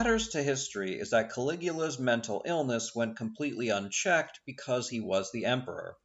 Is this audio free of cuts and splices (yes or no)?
yes